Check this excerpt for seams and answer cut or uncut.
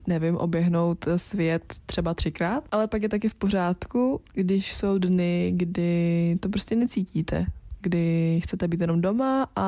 uncut